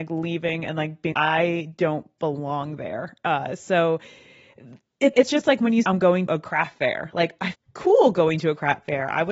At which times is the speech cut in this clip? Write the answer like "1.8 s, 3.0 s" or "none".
1.1 s, 5.1 s, 5.8 s, 6.3 s, 7.5 s